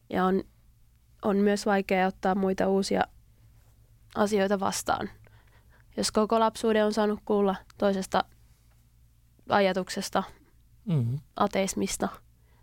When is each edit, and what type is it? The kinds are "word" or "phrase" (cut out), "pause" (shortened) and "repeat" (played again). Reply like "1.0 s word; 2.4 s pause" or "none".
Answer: 7.7 s pause